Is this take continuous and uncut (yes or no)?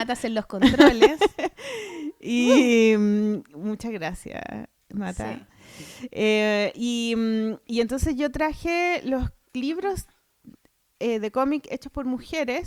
yes